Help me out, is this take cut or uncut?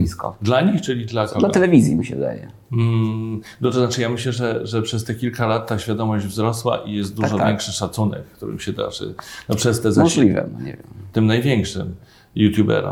uncut